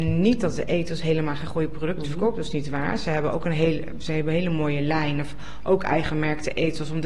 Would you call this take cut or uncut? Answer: uncut